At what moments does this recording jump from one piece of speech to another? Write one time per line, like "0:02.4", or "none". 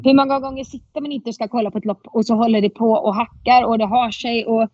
none